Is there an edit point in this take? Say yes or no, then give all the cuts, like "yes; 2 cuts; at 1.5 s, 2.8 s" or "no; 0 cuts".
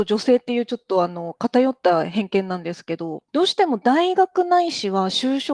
yes; 1 cut; at 3.3 s